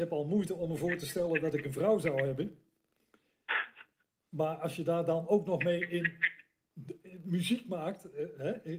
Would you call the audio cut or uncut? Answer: uncut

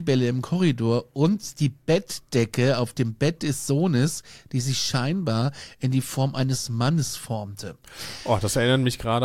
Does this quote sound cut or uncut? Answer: uncut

